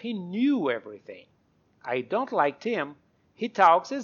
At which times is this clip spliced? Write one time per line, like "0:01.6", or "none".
none